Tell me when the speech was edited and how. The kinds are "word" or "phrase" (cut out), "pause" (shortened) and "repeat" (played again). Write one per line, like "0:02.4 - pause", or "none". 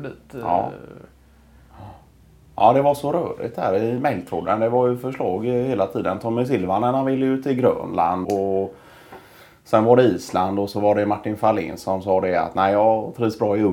0:08.2 - word